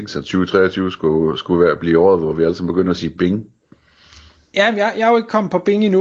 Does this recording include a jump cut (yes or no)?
no